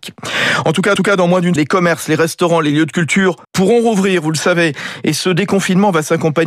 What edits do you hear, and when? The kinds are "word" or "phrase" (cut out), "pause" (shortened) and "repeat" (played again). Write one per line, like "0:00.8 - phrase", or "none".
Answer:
0:01.0 - repeat
0:01.6 - word
0:03.4 - pause